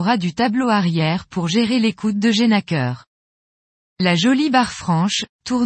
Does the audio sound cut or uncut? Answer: uncut